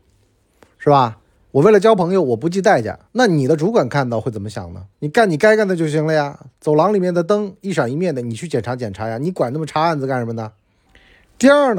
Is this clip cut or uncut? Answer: cut